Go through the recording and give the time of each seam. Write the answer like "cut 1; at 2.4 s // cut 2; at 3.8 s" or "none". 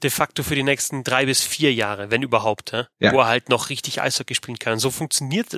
cut 1; at 2.9 s